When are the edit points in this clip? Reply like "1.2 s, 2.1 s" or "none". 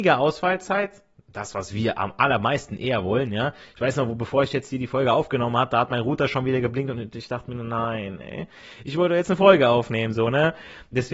none